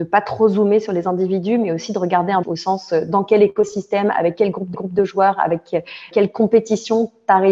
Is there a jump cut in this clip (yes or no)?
yes